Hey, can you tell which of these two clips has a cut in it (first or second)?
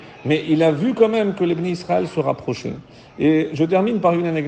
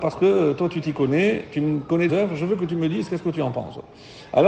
second